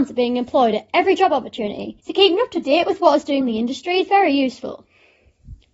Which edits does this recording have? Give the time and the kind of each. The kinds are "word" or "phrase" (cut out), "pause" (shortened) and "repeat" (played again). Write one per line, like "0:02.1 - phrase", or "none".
0:02.0 - pause
0:03.4 - word